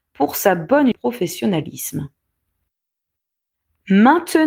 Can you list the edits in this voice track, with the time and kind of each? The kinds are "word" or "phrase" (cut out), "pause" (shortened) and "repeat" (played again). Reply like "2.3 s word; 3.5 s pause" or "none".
0.9 s phrase